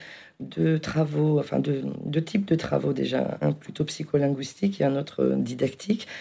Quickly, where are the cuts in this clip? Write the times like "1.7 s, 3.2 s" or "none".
3.4 s

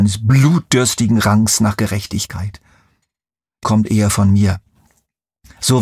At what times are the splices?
3.6 s

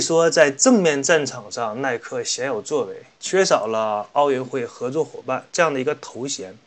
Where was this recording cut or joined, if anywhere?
3.1 s, 5.5 s

